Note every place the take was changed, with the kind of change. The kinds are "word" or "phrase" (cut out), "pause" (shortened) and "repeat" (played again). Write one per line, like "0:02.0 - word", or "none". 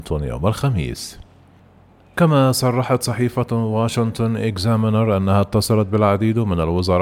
none